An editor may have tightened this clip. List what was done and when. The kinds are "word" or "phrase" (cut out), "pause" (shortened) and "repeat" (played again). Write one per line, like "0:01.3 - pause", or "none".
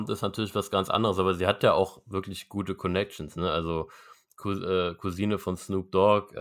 none